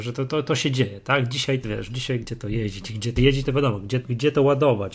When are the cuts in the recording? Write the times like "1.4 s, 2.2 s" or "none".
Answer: 1.6 s, 2.2 s, 3.2 s, 4.0 s